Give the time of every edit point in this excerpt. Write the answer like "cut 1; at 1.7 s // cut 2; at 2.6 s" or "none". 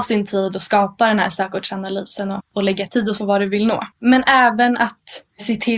cut 1; at 2.4 s // cut 2; at 3.2 s // cut 3; at 3.9 s